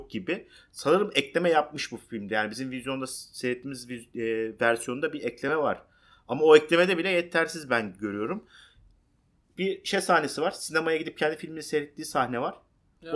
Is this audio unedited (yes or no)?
yes